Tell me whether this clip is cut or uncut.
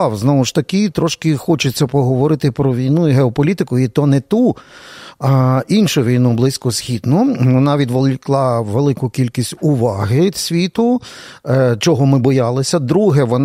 uncut